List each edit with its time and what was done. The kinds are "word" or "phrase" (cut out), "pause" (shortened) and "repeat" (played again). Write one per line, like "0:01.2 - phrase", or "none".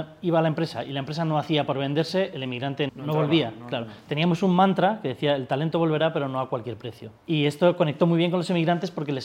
0:02.9 - word
0:07.2 - pause